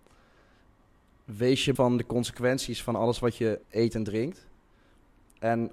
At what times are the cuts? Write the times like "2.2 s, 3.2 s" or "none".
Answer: 1.8 s, 3.6 s